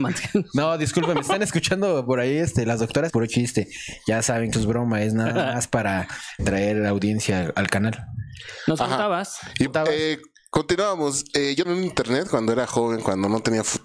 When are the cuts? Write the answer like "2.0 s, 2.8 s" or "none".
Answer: 1.3 s, 3.1 s, 4.5 s, 6.4 s, 9.7 s, 11.6 s